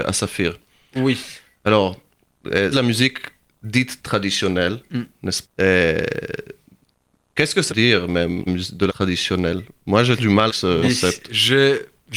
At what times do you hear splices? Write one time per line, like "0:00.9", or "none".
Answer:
0:02.7
0:05.4
0:07.7
0:08.5
0:08.9
0:10.2
0:10.5
0:10.8

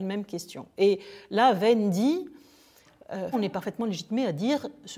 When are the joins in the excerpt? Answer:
0:03.3

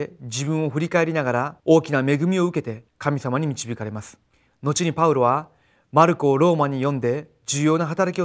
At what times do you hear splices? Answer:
0:01.6
0:02.9
0:04.3

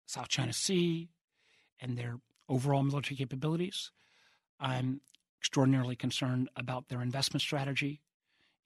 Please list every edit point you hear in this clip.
none

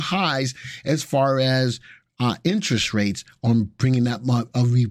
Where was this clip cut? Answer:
none

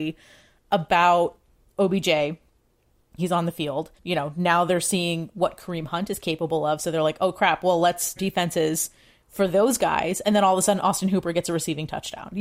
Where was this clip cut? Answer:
0:03.2
0:04.0
0:08.2

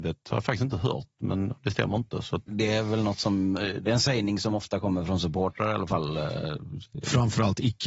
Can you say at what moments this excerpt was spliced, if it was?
0:02.5

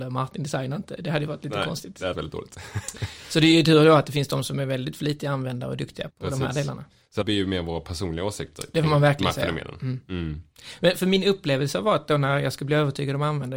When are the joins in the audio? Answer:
0:02.1
0:06.1
0:07.2

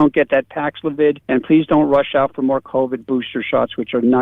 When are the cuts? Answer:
0:01.2

